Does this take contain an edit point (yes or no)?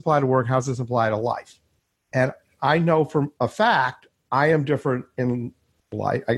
yes